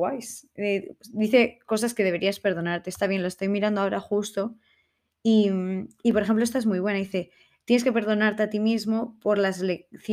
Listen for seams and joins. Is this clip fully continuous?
yes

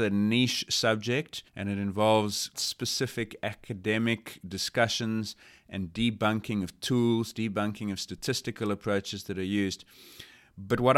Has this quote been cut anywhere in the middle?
yes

